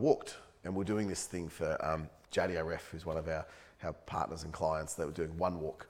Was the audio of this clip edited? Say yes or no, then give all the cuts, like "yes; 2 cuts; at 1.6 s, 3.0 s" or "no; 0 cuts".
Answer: no; 0 cuts